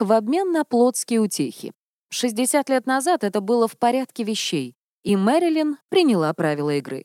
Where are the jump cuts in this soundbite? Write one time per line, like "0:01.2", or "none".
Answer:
none